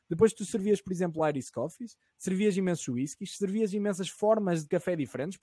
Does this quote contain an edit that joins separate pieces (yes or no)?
no